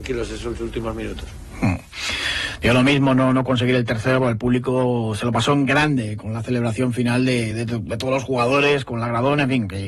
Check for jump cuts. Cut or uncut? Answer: uncut